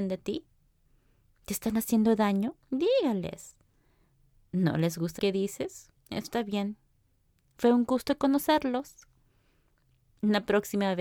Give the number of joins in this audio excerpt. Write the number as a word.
three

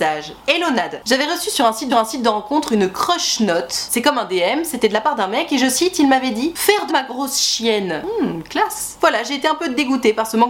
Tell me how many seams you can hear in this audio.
two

